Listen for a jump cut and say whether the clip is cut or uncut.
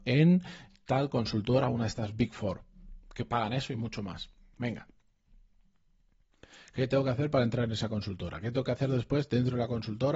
uncut